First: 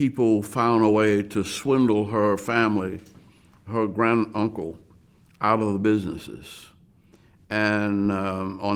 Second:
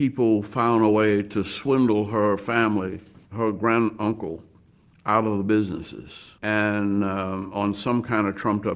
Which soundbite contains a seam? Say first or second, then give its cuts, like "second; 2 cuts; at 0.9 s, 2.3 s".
second; 2 cuts; at 3.3 s, 6.4 s